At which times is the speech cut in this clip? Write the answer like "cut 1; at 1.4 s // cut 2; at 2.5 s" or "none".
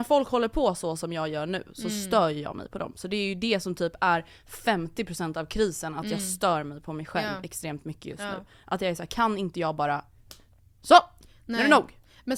none